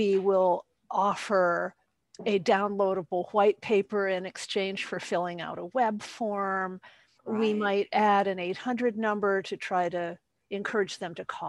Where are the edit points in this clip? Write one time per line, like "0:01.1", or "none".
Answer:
0:07.1

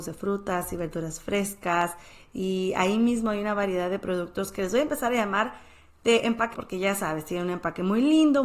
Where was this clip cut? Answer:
0:06.5

